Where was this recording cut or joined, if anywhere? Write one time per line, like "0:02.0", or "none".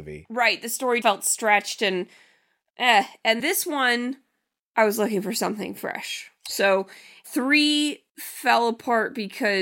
0:01.0
0:03.4